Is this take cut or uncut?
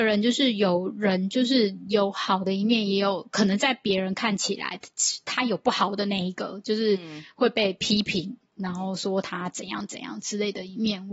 uncut